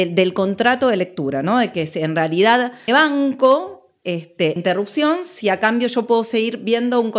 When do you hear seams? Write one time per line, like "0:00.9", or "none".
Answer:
0:02.9
0:04.6